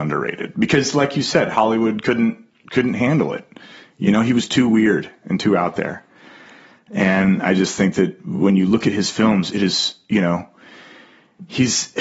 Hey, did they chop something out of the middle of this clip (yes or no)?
no